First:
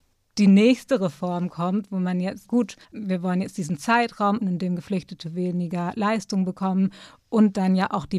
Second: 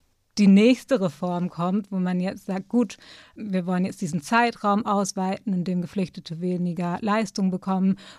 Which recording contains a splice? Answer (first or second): first